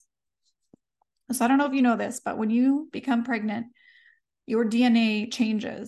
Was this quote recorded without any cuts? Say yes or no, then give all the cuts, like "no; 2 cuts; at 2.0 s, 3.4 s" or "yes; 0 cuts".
yes; 0 cuts